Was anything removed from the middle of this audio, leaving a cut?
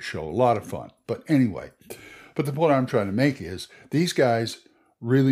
no; 0 cuts

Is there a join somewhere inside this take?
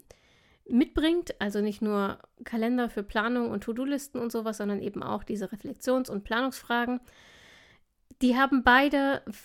no; 0 cuts

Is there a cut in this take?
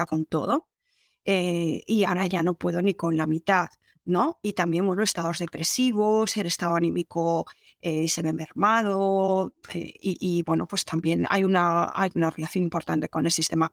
no; 0 cuts

